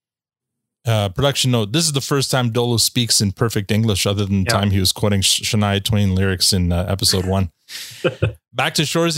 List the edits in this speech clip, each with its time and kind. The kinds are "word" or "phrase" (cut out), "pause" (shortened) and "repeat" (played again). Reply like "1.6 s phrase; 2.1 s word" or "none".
none